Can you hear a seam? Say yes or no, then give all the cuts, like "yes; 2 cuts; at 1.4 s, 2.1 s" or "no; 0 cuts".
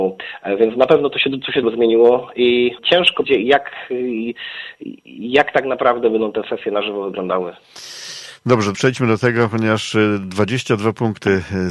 yes; 4 cuts; at 1.6 s, 2.8 s, 3.2 s, 8.7 s